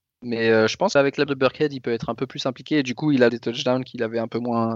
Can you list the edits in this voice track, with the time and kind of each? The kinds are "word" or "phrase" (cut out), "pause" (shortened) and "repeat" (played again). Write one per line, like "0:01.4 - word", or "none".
0:01.0 - word
0:01.3 - word
0:03.3 - word